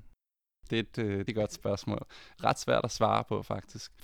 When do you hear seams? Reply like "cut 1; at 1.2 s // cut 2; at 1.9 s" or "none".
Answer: cut 1; at 1.3 s // cut 2; at 2.3 s

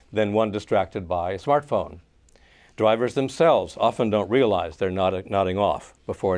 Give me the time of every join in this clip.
none

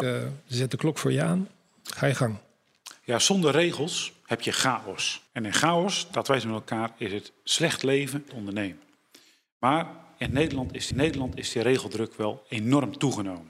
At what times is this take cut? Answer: cut 1; at 5.3 s // cut 2; at 8.3 s // cut 3; at 10.9 s

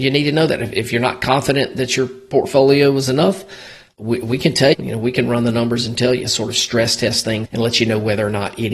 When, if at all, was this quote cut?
cut 1; at 4.7 s // cut 2; at 7.4 s

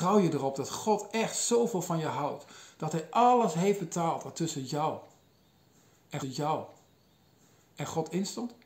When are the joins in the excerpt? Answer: cut 1; at 6.2 s

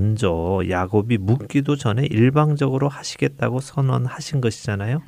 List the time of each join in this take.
none

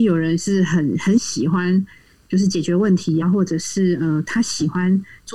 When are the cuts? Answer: cut 1; at 3.2 s

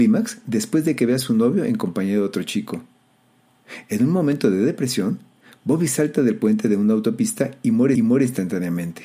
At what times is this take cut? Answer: cut 1; at 7.9 s

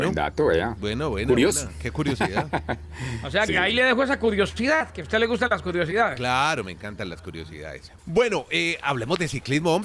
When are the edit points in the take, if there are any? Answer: cut 1; at 3.5 s // cut 2; at 8.0 s

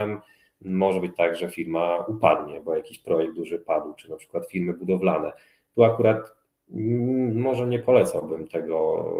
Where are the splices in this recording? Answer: none

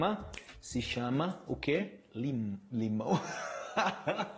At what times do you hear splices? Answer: none

